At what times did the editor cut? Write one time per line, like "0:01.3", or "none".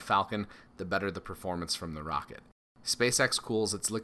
none

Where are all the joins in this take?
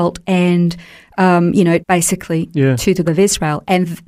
0:01.8
0:03.0

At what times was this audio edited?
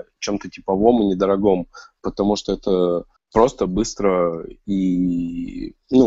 0:03.2

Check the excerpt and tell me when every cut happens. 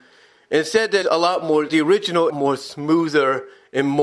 0:01.0
0:01.7
0:02.3

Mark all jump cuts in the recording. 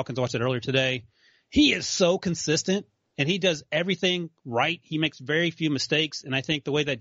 none

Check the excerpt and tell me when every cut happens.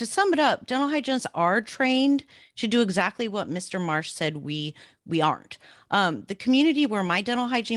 none

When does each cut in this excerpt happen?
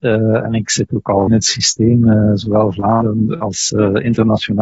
0:01.3

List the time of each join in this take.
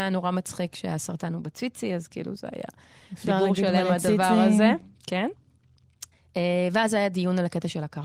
0:06.1

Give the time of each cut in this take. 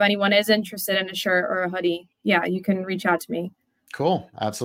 0:02.1

